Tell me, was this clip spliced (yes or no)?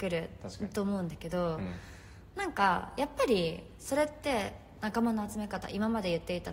no